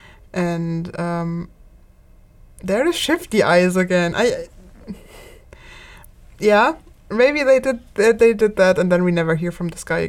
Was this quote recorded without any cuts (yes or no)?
yes